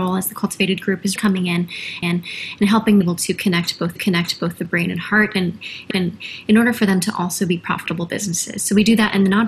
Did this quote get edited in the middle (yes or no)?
yes